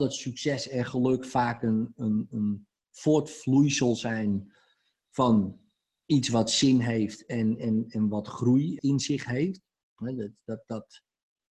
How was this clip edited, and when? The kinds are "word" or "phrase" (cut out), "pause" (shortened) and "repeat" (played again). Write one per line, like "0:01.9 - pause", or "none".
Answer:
none